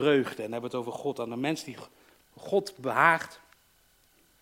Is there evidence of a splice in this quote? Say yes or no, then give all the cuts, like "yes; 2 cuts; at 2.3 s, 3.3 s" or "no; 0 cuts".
no; 0 cuts